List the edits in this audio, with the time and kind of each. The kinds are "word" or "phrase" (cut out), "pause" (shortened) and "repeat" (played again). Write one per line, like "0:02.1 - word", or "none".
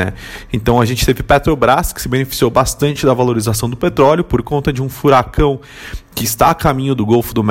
none